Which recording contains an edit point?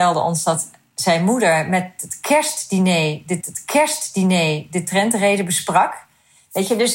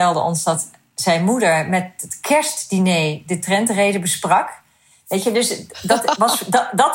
first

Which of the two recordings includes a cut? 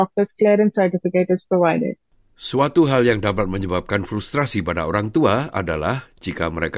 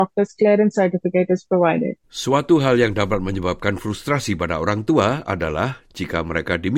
second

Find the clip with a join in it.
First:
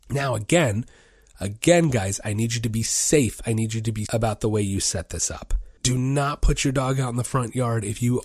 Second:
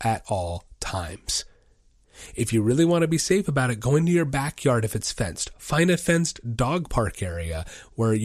first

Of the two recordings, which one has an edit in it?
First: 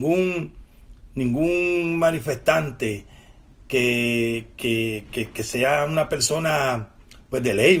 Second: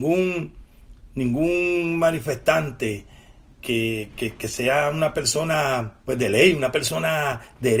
second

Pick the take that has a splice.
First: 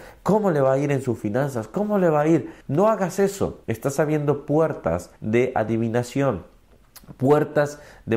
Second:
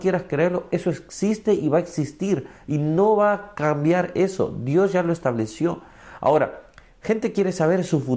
first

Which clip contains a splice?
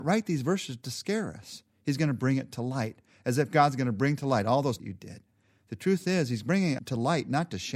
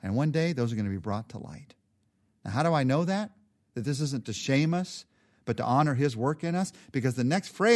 first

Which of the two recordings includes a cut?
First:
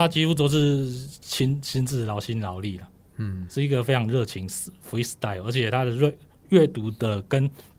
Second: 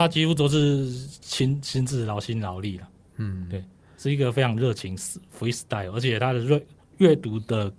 first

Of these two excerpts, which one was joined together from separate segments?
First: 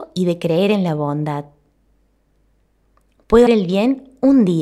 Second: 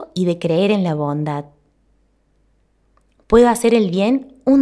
first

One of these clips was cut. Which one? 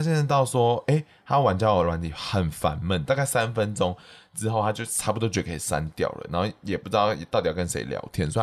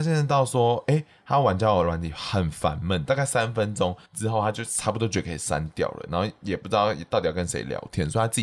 second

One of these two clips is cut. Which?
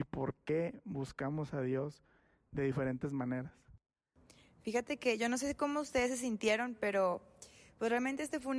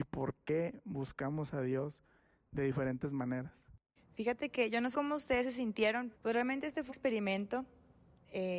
second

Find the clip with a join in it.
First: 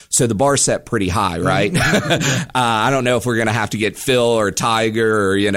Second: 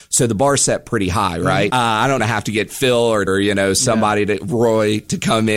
second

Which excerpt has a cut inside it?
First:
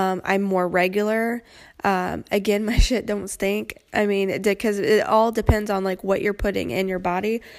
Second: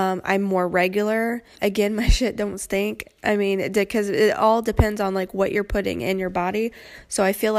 second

